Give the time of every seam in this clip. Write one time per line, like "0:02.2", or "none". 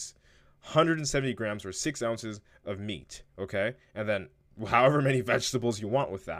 0:03.3